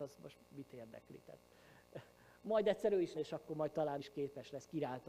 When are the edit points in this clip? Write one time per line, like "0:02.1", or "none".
0:03.1
0:04.0